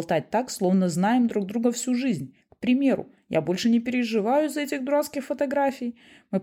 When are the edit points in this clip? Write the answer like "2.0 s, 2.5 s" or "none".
none